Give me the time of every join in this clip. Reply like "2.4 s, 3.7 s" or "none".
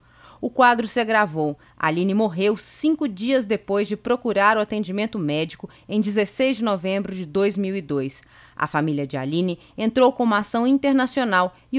none